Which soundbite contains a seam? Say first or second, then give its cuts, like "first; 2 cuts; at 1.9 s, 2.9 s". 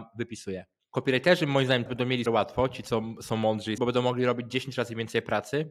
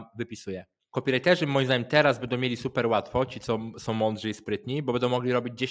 first; 3 cuts; at 1.9 s, 2.3 s, 3.8 s